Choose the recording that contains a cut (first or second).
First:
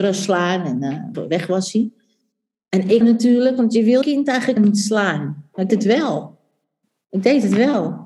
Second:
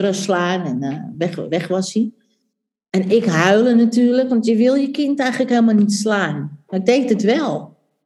first